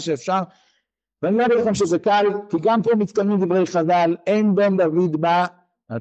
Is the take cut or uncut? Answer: uncut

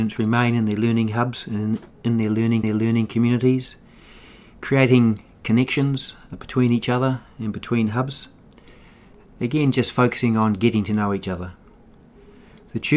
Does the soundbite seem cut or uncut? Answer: cut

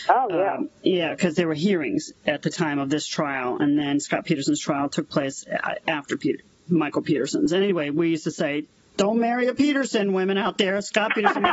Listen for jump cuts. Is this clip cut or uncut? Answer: uncut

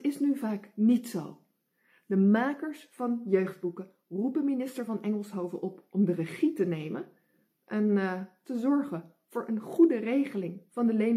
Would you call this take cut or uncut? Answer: uncut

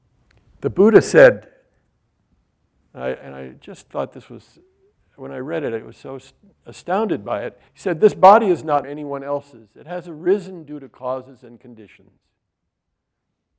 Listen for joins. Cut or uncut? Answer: cut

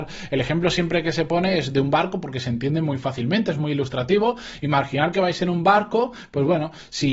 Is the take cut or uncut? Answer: uncut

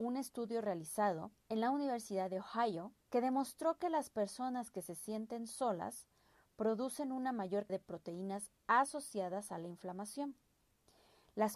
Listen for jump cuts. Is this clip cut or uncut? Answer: cut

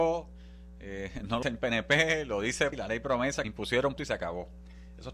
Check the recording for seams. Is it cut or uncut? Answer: cut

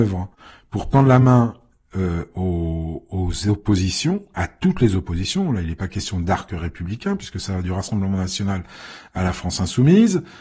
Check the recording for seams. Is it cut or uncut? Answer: uncut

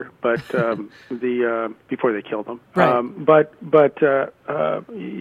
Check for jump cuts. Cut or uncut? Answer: cut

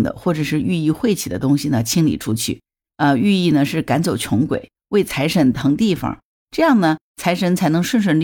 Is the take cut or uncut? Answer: uncut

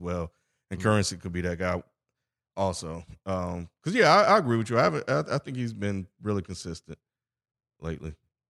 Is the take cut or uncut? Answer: uncut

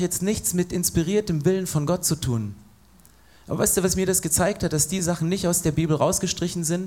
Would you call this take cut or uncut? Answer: uncut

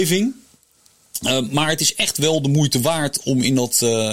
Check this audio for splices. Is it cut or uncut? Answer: uncut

